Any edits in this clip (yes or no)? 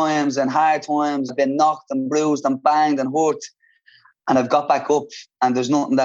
yes